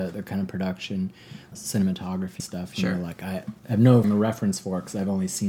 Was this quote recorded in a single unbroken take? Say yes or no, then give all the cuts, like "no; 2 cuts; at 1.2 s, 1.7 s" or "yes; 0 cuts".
no; 4 cuts; at 1.5 s, 2.4 s, 3.6 s, 4.0 s